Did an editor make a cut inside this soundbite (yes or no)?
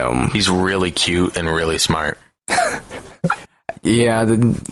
no